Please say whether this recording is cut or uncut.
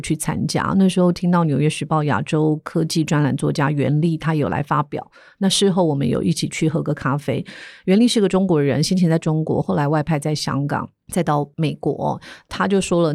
uncut